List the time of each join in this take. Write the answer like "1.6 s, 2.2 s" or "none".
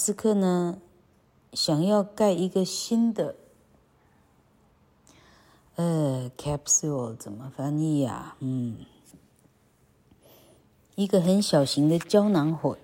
none